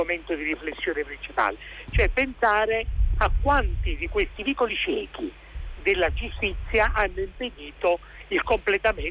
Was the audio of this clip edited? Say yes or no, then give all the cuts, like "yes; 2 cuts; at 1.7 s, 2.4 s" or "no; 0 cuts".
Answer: no; 0 cuts